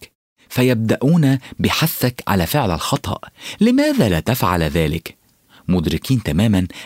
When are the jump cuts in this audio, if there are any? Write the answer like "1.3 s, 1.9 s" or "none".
none